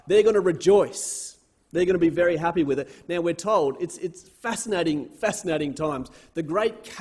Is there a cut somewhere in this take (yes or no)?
no